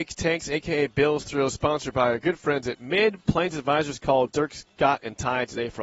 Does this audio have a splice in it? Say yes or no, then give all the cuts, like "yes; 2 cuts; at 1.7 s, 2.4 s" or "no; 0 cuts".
no; 0 cuts